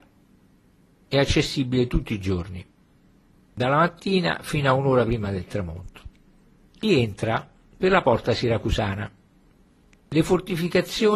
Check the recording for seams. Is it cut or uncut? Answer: uncut